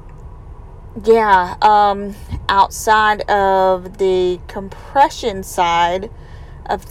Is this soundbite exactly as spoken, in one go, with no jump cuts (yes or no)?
yes